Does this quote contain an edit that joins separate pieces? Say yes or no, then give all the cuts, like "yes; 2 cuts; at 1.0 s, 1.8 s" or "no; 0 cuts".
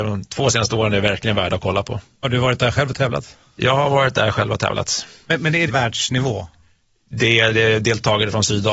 yes; 1 cut; at 5.7 s